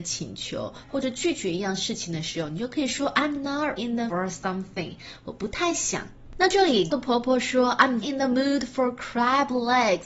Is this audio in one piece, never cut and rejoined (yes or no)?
no